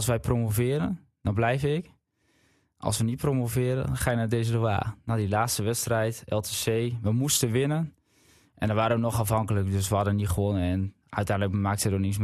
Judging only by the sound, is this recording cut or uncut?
uncut